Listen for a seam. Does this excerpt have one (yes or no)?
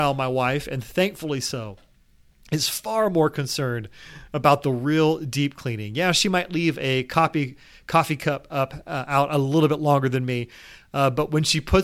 no